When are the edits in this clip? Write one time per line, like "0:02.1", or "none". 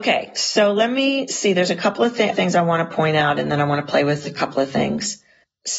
0:02.3